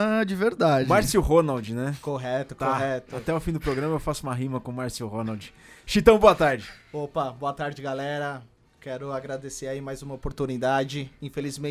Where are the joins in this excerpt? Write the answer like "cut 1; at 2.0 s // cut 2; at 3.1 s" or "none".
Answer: none